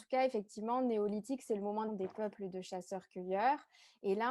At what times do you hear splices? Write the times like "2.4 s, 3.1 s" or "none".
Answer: 1.9 s